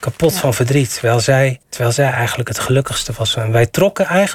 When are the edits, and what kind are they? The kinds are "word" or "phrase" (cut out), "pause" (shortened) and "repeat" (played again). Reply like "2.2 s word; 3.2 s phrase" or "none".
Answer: 1.6 s pause